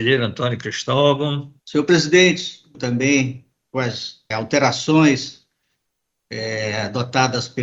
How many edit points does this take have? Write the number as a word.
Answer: three